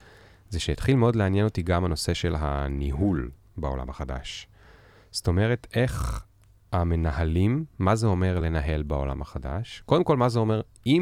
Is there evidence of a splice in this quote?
no; 0 cuts

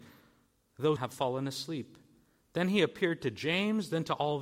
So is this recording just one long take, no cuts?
no; 1 cut; at 1.0 s

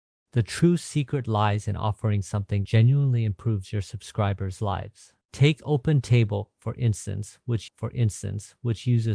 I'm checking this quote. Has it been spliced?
yes; 3 cuts; at 2.7 s, 5.2 s, 7.7 s

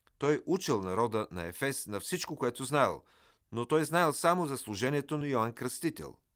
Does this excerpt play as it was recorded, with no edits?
yes; 0 cuts

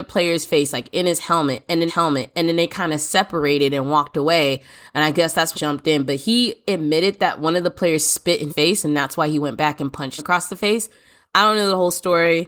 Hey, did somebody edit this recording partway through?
yes; 4 cuts; at 1.9 s, 5.5 s, 8.5 s, 10.2 s

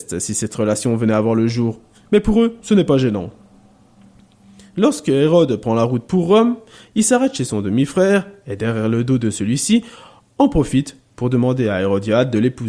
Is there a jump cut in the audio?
no; 0 cuts

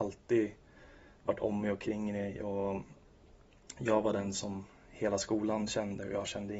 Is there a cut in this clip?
no; 0 cuts

